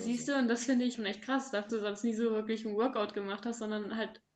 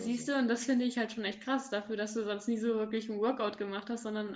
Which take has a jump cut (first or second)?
first